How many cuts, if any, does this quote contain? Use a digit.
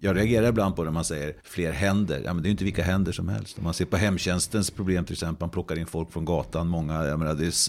1